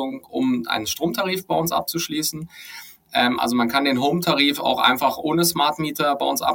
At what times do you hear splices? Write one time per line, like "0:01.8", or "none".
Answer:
none